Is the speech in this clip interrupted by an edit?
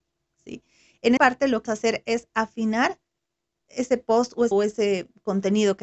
yes; 4 cuts; at 1.2 s, 1.7 s, 3.7 s, 4.5 s

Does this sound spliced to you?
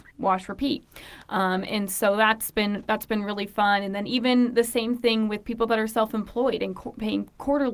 no; 0 cuts

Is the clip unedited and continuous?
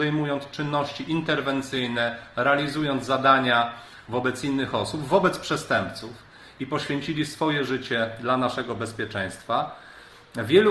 yes; 0 cuts

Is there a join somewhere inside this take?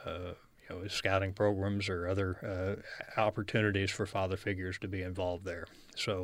no; 0 cuts

